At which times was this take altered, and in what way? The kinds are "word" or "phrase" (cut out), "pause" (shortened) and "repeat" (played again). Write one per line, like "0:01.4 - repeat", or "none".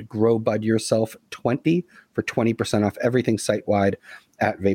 none